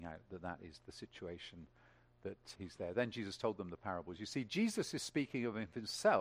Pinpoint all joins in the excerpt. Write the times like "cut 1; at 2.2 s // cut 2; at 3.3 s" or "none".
cut 1; at 2.6 s